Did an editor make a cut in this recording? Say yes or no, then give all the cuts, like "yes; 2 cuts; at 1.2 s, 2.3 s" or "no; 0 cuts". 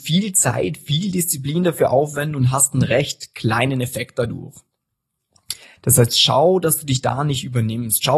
no; 0 cuts